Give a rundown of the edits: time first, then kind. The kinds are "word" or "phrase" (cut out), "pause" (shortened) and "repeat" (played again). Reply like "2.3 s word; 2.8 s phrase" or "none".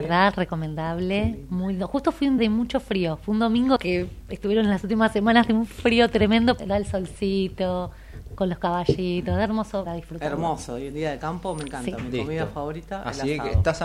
2.4 s word; 3.8 s phrase; 6.6 s word; 9.9 s word